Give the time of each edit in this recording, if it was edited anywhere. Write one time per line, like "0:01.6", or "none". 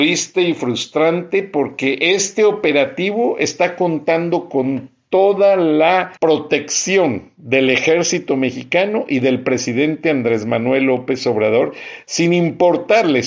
0:06.2